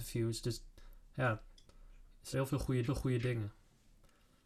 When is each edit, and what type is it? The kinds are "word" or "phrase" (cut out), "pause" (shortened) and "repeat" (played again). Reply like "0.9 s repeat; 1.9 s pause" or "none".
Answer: 2.3 s phrase; 2.8 s repeat